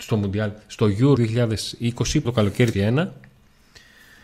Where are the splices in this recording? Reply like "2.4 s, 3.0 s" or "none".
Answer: 1.2 s, 2.2 s, 2.7 s